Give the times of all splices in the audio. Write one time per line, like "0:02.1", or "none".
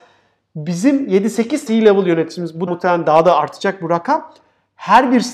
0:01.7
0:02.7